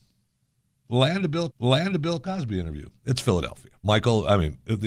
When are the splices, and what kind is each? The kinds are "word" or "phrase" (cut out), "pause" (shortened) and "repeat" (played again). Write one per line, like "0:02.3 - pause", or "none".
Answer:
0:01.5 - repeat
0:03.8 - pause